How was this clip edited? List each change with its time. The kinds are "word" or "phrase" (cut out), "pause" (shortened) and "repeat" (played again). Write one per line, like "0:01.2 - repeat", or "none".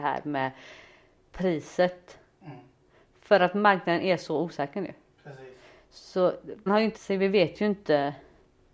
0:06.7 - word
0:07.0 - word